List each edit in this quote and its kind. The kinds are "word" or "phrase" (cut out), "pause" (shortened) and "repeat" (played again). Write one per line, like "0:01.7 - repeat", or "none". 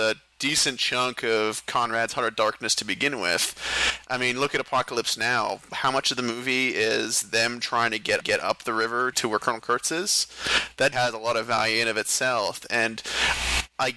0:08.2 - repeat
0:09.1 - word
0:10.9 - word

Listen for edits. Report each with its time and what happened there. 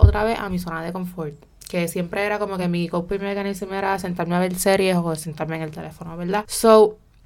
none

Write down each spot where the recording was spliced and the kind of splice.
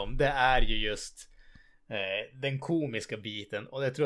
none

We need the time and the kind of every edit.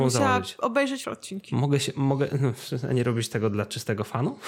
0:01.0 - phrase

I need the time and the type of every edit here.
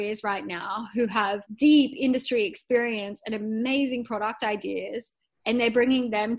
0:01.5 - pause
0:05.3 - pause

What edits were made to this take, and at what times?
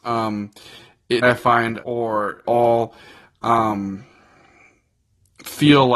0:01.2 - word
0:01.8 - word
0:02.4 - word

